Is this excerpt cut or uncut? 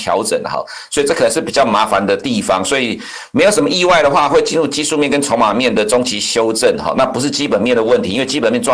uncut